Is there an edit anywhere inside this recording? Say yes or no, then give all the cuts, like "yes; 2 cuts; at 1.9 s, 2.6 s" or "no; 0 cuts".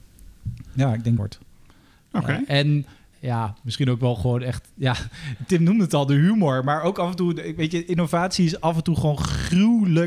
yes; 2 cuts; at 1.2 s, 3.1 s